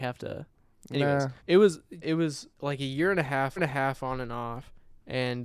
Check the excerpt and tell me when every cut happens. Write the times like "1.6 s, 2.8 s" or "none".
1.4 s, 2.0 s, 2.5 s, 3.6 s